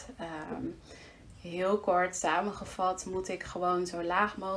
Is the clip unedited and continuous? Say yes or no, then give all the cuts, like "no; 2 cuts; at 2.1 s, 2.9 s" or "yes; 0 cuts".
yes; 0 cuts